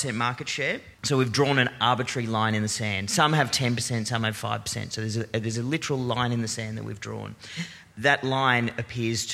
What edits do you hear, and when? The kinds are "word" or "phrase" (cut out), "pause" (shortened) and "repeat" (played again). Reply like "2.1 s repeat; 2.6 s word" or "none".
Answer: 0.9 s pause